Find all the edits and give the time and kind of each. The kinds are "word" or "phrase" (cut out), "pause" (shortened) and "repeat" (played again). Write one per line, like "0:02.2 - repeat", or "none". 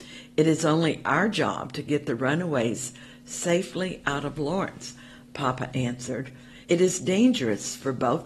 0:06.6 - pause